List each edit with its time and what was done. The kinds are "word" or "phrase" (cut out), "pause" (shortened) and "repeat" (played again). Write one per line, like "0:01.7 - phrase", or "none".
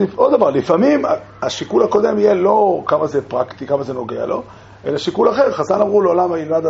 none